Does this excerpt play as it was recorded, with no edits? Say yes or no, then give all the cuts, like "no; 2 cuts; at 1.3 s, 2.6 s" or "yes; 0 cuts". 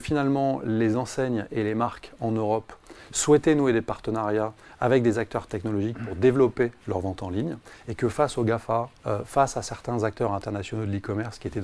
no; 1 cut; at 9.0 s